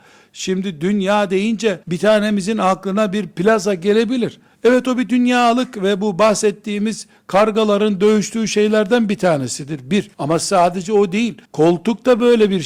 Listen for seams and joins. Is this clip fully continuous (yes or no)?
no